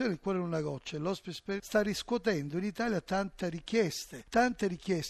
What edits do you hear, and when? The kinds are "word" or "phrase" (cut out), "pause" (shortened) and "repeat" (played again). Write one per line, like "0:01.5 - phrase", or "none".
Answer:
0:01.6 - word